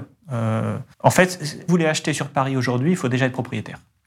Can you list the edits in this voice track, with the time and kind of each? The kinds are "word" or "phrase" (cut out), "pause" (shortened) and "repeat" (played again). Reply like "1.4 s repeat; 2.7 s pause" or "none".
0.9 s pause; 1.7 s phrase